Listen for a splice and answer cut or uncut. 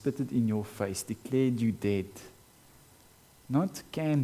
uncut